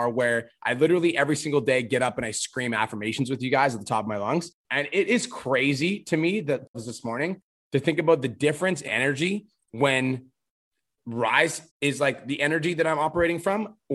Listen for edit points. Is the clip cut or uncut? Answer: cut